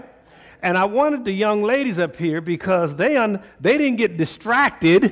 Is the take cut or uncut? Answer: uncut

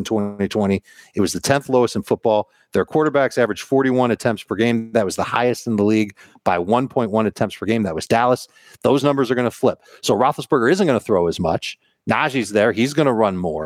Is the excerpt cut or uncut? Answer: uncut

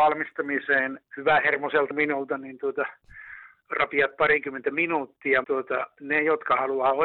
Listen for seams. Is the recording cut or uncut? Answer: cut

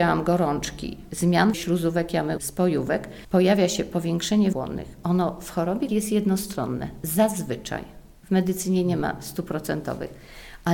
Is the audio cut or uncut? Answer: cut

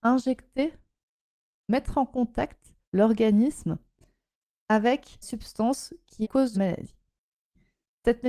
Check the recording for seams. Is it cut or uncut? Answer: cut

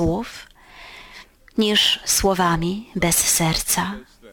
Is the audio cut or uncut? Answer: uncut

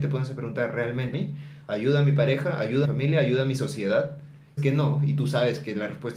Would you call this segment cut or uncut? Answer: cut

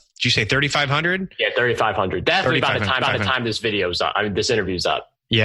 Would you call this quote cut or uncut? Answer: cut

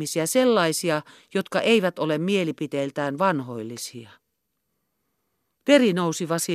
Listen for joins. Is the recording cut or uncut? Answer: uncut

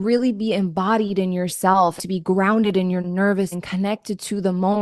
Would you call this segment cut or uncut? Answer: cut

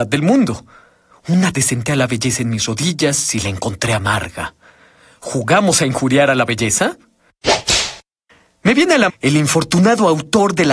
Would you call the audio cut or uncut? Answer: cut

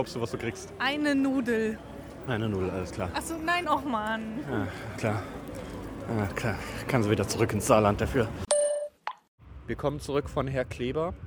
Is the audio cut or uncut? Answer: cut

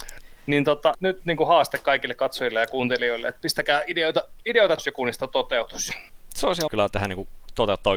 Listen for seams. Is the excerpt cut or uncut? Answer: cut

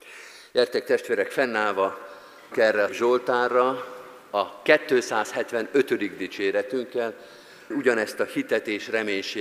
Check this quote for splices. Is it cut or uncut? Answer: cut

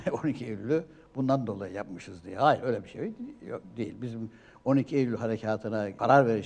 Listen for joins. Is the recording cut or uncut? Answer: uncut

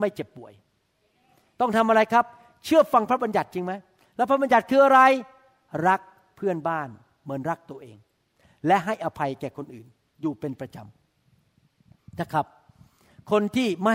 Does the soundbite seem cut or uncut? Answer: uncut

